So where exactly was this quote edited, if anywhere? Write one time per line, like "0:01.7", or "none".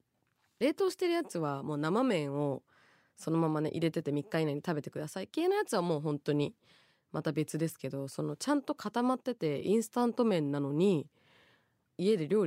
none

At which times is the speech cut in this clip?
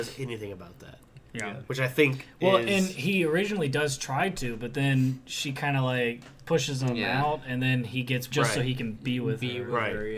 0:08.3

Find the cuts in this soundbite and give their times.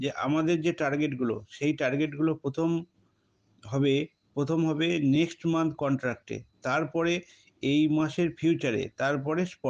none

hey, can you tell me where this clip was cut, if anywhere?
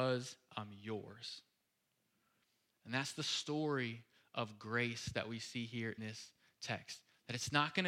0:06.0

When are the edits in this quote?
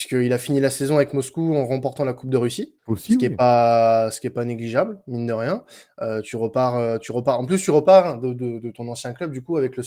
0:02.8

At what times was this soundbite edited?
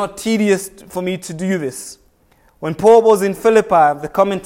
none

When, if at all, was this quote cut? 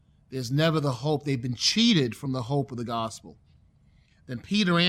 none

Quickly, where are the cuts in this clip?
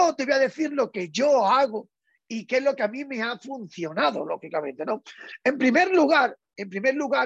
none

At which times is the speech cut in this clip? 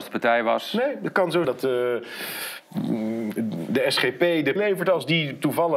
0:01.4
0:04.6

